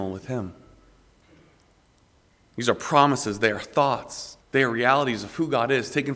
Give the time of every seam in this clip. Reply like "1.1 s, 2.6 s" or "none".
4.4 s